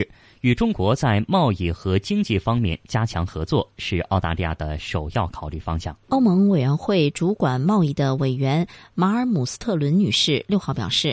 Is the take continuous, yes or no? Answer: no